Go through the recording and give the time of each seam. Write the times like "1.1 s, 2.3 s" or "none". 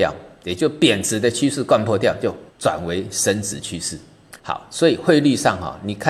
2.5 s, 4.4 s